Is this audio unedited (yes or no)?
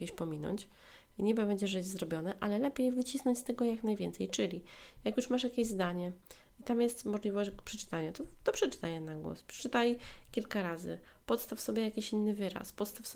yes